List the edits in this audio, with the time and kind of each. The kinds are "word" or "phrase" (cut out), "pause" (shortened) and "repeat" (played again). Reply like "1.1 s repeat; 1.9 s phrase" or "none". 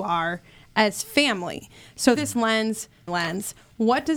2.2 s word; 3.1 s word